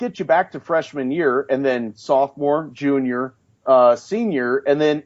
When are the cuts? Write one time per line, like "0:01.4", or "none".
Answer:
none